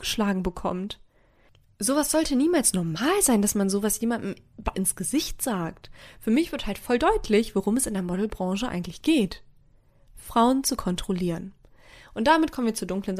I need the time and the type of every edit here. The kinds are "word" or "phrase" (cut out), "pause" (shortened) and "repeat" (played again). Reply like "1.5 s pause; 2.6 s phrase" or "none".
4.7 s phrase